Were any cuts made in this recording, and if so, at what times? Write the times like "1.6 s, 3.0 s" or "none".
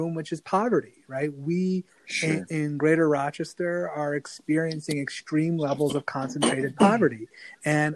none